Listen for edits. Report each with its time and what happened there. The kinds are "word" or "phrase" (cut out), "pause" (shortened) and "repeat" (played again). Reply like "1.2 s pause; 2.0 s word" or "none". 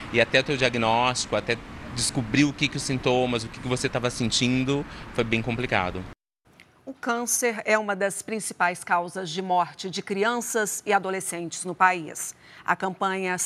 6.4 s pause

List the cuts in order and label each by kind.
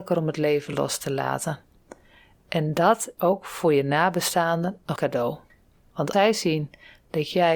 3.2 s word; 5.0 s word; 6.1 s word

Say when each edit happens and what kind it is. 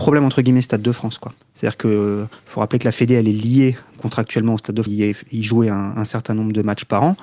2.4 s pause; 4.9 s phrase

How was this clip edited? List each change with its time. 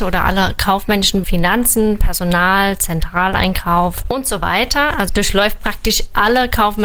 1.2 s word; 4.0 s word; 5.1 s word

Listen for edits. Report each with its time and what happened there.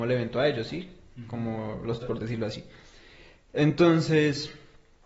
2.0 s word

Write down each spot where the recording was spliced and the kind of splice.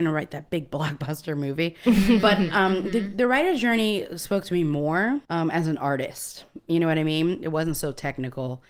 5.2 s pause

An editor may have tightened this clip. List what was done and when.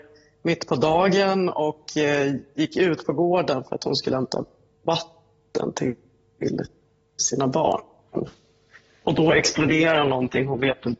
none

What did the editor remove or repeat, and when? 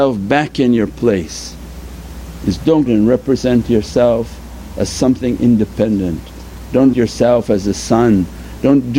2.9 s phrase; 6.9 s word

